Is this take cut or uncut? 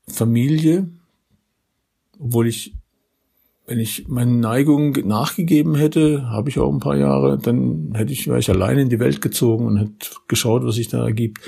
uncut